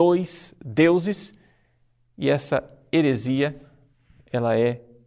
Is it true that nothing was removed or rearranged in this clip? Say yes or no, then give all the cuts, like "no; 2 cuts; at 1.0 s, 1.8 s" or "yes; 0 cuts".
yes; 0 cuts